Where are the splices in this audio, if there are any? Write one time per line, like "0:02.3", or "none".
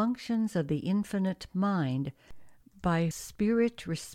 0:03.1